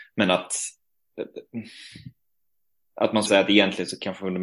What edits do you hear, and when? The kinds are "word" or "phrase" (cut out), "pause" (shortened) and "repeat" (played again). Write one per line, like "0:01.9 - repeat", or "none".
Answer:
0:03.3 - word

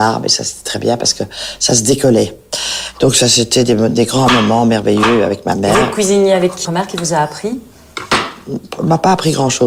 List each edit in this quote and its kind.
0:06.6 - phrase

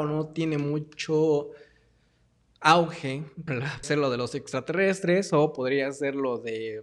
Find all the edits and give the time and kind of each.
0:03.5 - word
0:03.8 - word

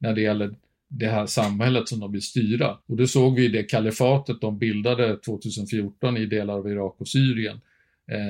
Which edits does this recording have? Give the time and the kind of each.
0:02.8 - pause

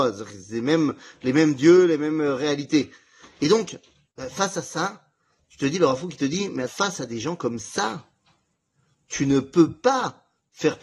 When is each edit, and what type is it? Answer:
0:06.7 - word

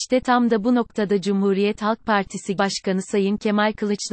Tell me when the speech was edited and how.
0:02.6 - word

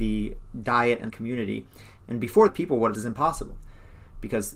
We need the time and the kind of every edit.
0:01.1 - word
0:02.5 - phrase
0:02.9 - phrase

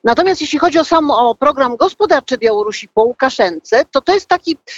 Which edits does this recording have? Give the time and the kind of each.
0:02.4 - word

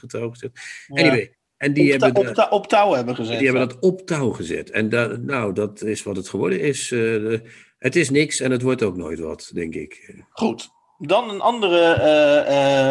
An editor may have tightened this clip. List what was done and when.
none

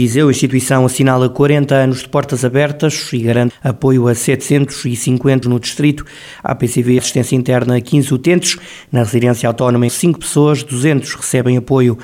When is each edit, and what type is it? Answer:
0:03.5 - word
0:05.4 - word
0:07.0 - word
0:09.9 - word

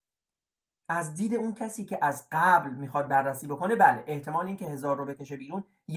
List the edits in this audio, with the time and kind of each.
none

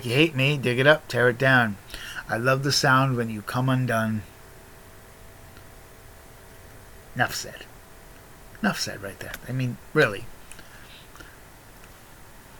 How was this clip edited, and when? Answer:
none

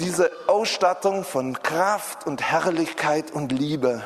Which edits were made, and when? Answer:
none

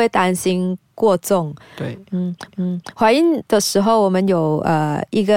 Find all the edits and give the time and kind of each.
0:02.5 - repeat

